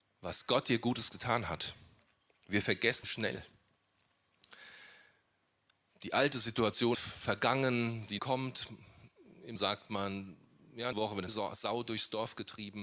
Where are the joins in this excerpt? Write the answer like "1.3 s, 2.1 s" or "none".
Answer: 3.0 s, 6.9 s, 8.2 s, 9.6 s, 10.9 s, 11.3 s